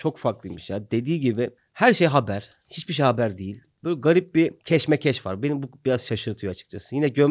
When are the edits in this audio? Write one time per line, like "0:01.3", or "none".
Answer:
0:01.6
0:04.6